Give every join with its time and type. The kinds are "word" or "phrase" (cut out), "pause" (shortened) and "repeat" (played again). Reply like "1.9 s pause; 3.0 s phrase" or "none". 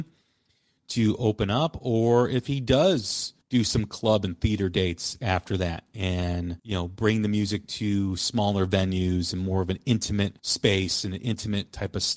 3.4 s pause; 6.6 s pause; 10.4 s pause